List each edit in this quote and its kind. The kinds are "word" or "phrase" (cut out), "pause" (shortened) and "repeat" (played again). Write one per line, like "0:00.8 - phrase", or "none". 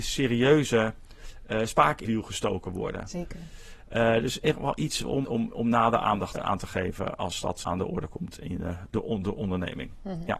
0:02.0 - word
0:05.2 - word
0:06.3 - word
0:07.6 - word